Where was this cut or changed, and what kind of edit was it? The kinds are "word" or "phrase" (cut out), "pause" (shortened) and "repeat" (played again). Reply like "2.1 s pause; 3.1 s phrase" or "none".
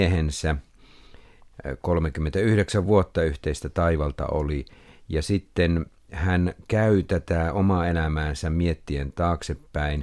none